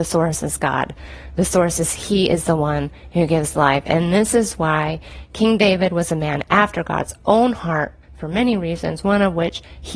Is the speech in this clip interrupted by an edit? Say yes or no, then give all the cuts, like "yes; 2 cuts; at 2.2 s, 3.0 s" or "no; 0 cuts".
yes; 1 cut; at 8.0 s